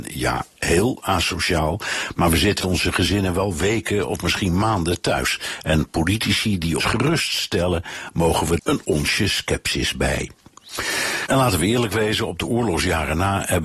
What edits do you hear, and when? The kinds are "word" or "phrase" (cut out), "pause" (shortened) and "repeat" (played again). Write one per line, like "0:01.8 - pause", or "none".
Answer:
0:02.6 - word
0:06.8 - word
0:08.6 - word